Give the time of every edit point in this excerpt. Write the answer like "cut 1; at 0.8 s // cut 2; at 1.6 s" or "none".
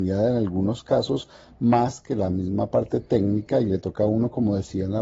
none